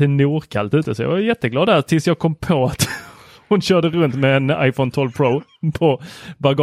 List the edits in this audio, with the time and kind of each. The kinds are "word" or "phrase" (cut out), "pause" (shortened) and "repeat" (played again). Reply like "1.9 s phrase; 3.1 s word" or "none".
none